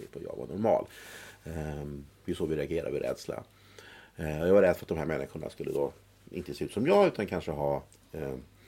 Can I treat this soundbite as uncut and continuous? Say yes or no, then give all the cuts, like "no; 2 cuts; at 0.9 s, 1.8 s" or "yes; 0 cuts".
yes; 0 cuts